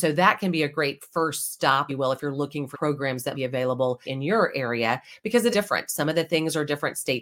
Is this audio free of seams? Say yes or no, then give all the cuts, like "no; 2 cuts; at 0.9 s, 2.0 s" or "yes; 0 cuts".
no; 5 cuts; at 1.9 s, 2.7 s, 3.3 s, 4.1 s, 5.5 s